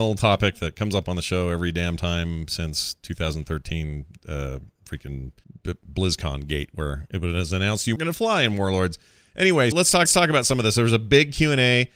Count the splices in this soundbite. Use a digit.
4